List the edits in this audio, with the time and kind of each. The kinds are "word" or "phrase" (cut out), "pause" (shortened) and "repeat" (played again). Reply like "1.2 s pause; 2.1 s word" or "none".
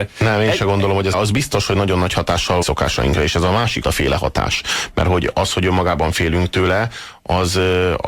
1.1 s phrase; 2.6 s phrase; 3.8 s word

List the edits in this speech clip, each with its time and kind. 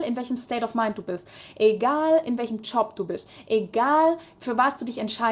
none

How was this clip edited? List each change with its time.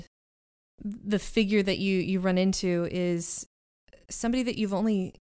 none

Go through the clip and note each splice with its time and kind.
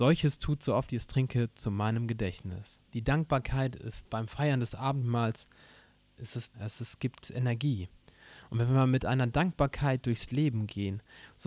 2.8 s pause; 6.2 s word; 6.5 s word; 7.2 s phrase

